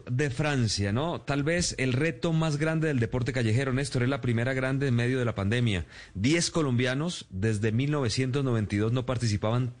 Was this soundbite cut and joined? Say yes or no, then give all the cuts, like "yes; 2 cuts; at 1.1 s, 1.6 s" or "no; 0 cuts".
no; 0 cuts